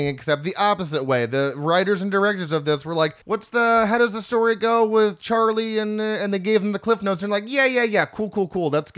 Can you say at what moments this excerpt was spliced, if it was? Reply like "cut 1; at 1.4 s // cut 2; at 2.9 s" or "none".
cut 1; at 3.2 s